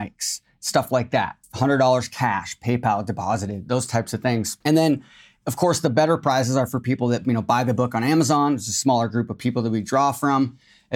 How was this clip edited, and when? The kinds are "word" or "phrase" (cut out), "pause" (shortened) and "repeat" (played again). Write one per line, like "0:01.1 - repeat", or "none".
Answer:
0:01.4 - pause
0:04.6 - pause